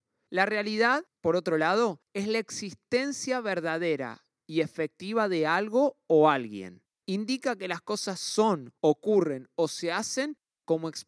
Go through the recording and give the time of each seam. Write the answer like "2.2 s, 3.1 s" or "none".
2.1 s, 6.9 s, 8.8 s

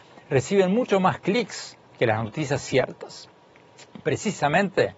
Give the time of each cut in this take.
none

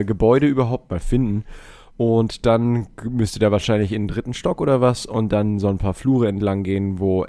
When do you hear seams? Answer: none

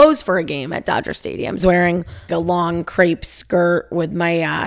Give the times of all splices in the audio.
1.6 s, 2.3 s

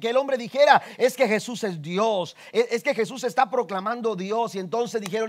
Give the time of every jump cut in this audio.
none

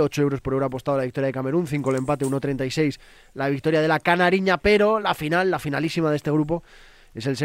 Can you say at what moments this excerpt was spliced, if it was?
none

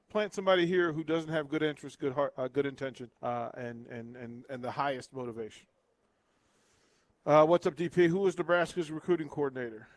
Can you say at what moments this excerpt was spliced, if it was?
3.2 s

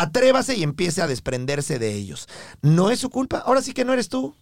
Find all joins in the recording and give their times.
none

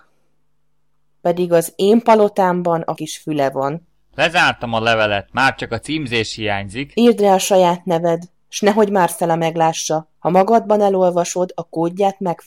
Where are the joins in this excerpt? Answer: 3.0 s, 10.2 s

